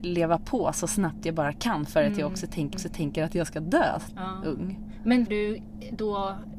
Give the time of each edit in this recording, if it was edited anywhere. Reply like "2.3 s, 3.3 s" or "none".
2.7 s, 5.3 s